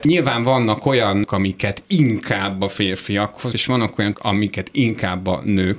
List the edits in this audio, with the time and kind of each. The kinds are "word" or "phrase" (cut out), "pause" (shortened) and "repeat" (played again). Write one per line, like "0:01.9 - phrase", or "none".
0:01.3 - word
0:03.5 - word
0:04.1 - word